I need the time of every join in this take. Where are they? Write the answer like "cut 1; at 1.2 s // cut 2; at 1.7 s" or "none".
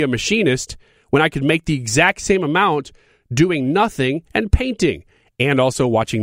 none